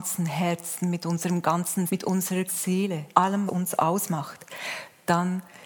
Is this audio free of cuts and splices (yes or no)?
no